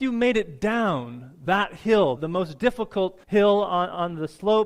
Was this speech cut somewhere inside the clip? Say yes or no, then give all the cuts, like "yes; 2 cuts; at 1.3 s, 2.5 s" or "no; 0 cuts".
yes; 2 cuts; at 2.2 s, 3.2 s